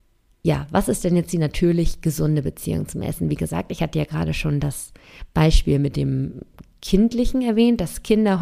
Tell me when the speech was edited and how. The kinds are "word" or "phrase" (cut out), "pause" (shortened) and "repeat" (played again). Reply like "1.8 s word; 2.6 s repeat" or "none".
none